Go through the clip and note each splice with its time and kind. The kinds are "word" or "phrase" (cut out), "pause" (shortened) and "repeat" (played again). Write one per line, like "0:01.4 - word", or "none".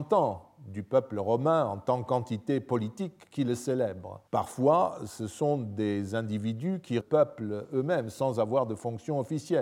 0:04.3 - pause
0:07.0 - phrase